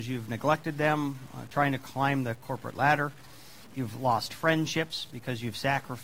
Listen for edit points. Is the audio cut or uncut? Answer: uncut